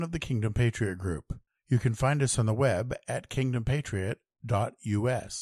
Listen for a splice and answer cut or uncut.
uncut